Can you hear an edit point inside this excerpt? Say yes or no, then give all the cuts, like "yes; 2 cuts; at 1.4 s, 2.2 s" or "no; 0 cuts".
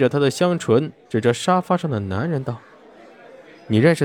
no; 0 cuts